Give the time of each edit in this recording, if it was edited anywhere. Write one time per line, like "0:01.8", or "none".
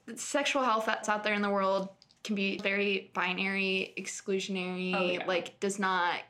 0:01.0
0:02.6